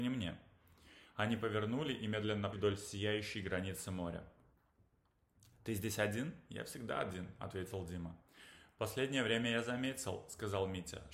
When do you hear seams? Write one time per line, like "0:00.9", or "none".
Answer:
0:02.5